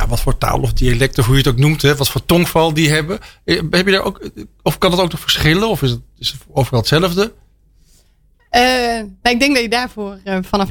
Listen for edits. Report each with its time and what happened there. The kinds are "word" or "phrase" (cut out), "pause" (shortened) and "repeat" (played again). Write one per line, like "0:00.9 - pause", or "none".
none